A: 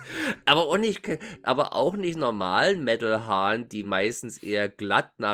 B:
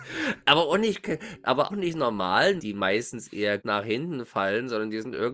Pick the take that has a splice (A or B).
B